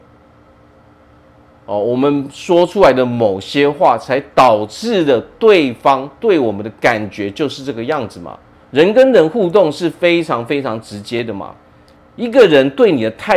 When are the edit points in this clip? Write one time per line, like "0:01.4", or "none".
0:08.5
0:12.0